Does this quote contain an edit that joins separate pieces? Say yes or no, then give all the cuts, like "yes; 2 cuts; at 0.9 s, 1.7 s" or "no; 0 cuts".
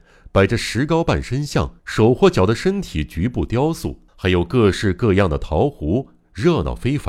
yes; 2 cuts; at 1.8 s, 4.1 s